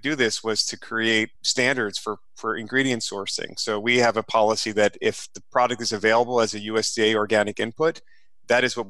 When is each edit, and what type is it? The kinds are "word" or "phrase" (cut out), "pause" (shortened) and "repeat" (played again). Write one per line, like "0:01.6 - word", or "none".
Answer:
0:01.3 - pause